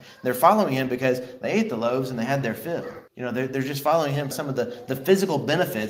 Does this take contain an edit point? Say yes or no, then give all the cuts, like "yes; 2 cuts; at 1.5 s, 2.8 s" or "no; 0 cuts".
yes; 2 cuts; at 3.1 s, 4.3 s